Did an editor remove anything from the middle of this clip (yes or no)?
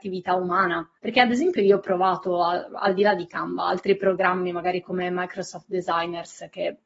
yes